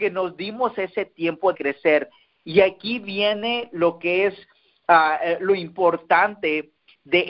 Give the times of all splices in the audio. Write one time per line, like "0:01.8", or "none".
0:01.5